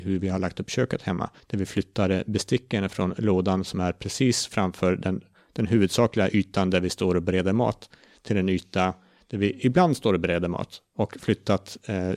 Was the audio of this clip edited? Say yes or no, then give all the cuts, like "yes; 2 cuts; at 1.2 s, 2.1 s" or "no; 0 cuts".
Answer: yes; 1 cut; at 1.4 s